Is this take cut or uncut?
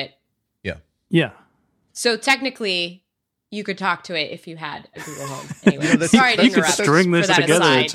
uncut